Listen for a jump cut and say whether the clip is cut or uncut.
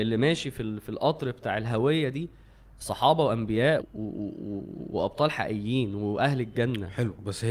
cut